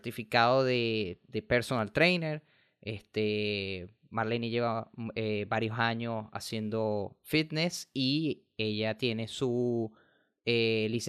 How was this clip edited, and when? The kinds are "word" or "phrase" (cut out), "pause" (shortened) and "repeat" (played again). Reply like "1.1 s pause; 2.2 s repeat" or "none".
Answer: none